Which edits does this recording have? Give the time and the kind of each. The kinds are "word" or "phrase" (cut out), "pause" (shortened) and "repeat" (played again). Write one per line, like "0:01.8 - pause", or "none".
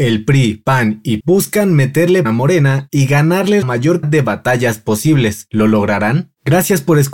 0:01.2 - word
0:02.2 - word
0:03.6 - word
0:04.0 - word